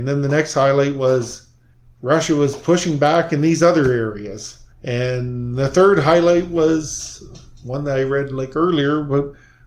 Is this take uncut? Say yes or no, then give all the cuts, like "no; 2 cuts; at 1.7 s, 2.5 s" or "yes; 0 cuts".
no; 2 cuts; at 1.7 s, 4.7 s